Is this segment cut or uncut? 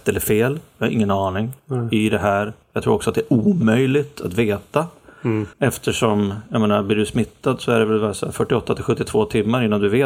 cut